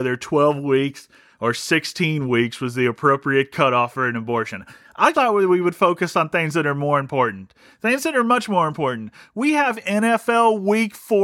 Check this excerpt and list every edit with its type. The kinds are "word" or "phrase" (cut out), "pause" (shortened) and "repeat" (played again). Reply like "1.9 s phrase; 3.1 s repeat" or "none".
5.1 s word

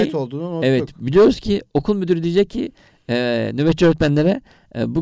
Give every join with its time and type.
none

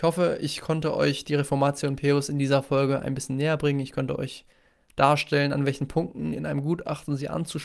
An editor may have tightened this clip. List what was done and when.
none

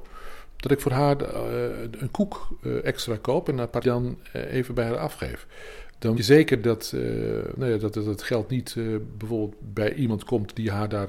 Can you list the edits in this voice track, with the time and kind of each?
3.8 s phrase; 6.2 s word

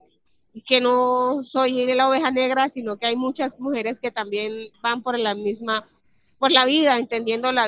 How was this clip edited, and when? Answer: 4.7 s phrase

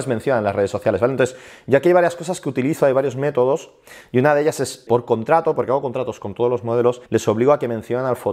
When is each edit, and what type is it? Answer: 4.9 s word; 7.1 s pause

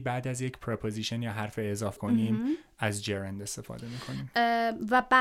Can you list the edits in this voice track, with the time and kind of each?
2.0 s word

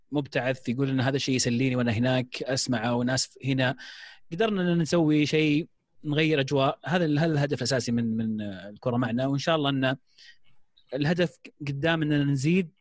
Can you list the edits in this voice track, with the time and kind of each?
none

